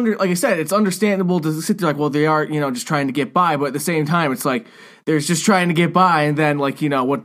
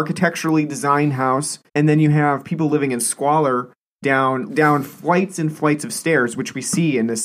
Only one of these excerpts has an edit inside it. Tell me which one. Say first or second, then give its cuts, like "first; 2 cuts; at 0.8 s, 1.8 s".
second; 2 cuts; at 1.7 s, 4.5 s